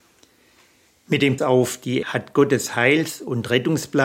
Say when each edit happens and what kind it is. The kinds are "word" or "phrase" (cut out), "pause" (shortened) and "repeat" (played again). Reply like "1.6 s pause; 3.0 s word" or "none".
1.4 s phrase; 2.0 s word